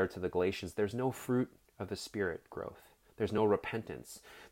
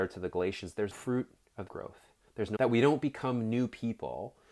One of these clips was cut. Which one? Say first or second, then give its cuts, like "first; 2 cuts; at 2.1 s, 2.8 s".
second; 3 cuts; at 0.9 s, 1.7 s, 2.6 s